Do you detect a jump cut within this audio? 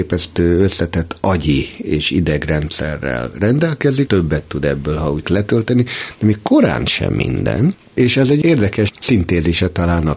yes; 2 cuts; at 4.1 s, 5.2 s

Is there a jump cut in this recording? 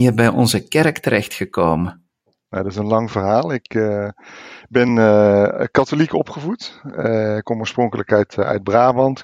no; 0 cuts

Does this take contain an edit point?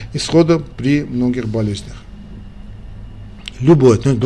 no; 0 cuts

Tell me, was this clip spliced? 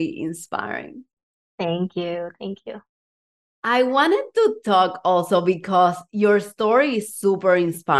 no; 0 cuts

